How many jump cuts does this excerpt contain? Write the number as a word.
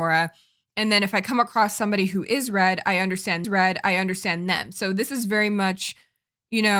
one